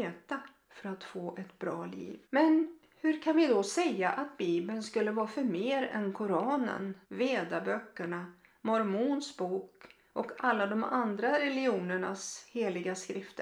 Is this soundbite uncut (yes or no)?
no